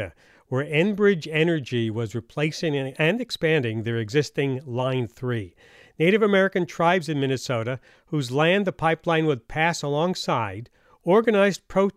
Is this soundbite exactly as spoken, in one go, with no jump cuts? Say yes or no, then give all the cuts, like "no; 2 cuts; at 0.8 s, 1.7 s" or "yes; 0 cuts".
yes; 0 cuts